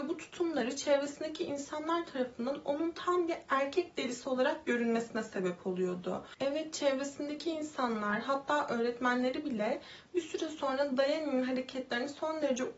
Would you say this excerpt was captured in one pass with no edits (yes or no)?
yes